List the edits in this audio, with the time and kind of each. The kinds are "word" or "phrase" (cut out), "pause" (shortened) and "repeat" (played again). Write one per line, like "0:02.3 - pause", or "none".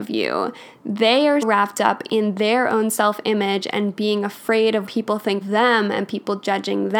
0:01.4 - word
0:04.9 - word
0:05.4 - word